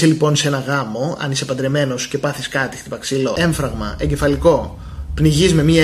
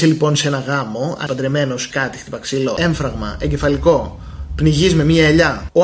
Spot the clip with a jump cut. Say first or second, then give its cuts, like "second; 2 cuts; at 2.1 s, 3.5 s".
second; 2 cuts; at 1.3 s, 1.9 s